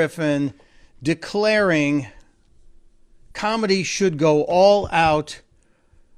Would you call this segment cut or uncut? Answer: uncut